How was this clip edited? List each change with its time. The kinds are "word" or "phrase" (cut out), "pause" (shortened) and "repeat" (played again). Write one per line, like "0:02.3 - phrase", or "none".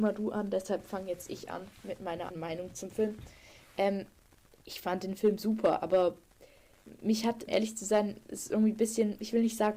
0:02.3 - word
0:07.5 - word